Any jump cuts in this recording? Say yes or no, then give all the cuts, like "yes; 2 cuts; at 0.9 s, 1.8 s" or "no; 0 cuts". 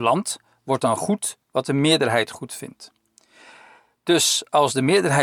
no; 0 cuts